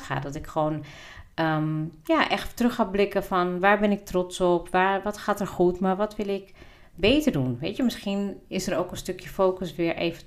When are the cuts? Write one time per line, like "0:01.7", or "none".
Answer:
none